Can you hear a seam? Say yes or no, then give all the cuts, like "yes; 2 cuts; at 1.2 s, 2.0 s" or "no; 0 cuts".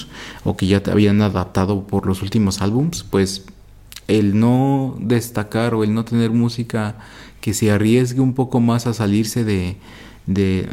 no; 0 cuts